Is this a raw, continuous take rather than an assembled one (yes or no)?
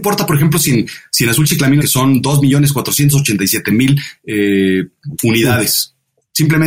no